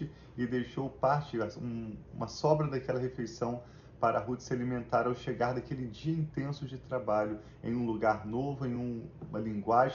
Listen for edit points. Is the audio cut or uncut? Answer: uncut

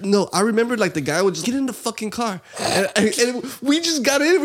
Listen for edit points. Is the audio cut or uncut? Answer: cut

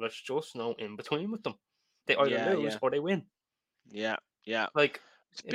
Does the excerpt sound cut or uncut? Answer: uncut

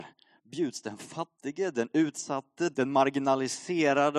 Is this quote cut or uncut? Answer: cut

